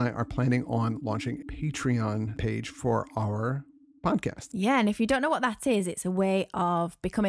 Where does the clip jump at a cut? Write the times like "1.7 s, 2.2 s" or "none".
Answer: 1.4 s